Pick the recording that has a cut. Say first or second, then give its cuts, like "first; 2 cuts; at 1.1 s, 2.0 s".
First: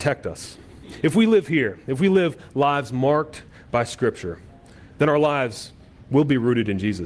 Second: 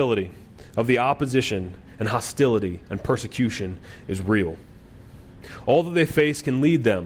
second; 1 cut; at 2.8 s